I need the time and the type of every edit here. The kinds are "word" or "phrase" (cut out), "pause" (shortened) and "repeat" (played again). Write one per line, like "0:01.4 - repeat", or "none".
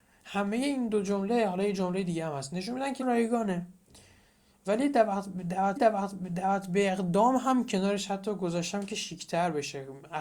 0:03.0 - word
0:05.8 - repeat